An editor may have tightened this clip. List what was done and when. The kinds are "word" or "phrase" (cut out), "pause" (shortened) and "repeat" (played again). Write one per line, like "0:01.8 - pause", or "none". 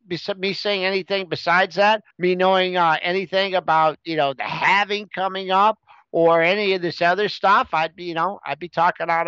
0:02.1 - pause